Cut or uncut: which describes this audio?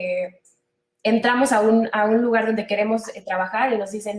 uncut